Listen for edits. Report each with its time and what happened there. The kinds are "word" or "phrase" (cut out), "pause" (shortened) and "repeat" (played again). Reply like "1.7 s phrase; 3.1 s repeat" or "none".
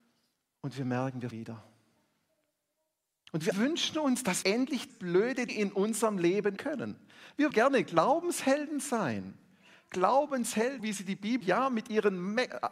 1.3 s word; 3.5 s word; 4.4 s word; 4.9 s word; 5.5 s word; 6.6 s word; 7.5 s word; 10.8 s word; 11.4 s word